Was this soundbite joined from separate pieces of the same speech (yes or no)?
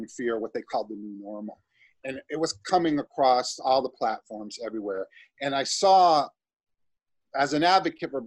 no